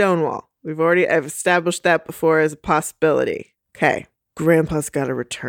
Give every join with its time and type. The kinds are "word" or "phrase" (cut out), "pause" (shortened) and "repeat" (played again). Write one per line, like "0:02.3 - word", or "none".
none